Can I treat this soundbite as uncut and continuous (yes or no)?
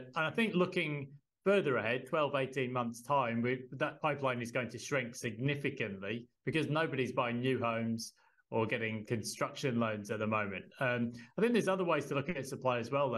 no